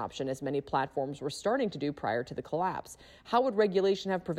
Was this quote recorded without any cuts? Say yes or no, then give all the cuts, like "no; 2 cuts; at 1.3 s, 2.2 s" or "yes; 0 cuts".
yes; 0 cuts